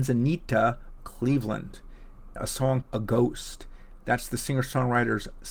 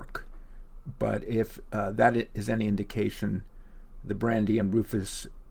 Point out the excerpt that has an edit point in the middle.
first; 3 cuts; at 1.0 s, 2.4 s, 2.8 s

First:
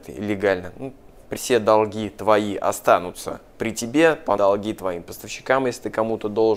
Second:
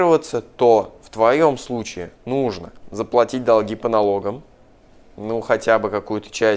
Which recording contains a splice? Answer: first; 2 cuts; at 1.4 s, 4.4 s

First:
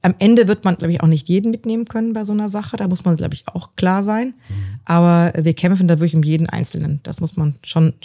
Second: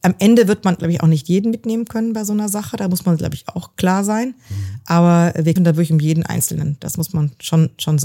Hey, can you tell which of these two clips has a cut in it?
second; 1 cut; at 5.6 s

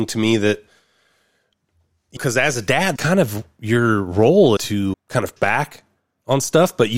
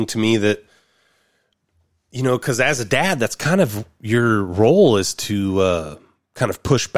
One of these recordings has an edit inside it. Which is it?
first; 5 cuts; at 2.2 s, 3.0 s, 4.6 s, 4.9 s, 5.4 s

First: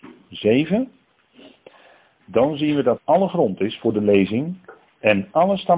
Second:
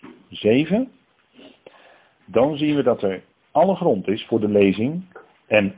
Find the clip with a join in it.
first; 1 cut; at 3.0 s

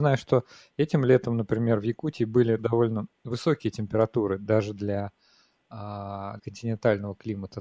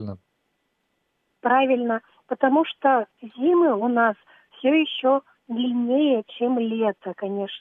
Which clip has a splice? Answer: first; 2 cuts; at 2.6 s, 6.4 s

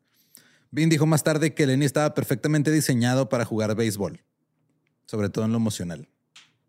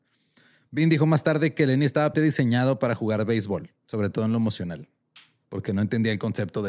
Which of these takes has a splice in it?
second; 2 cuts; at 2.1 s, 3.8 s

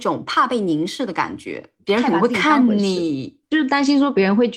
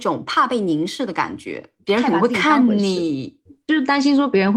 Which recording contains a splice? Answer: first; 1 cut; at 3.4 s

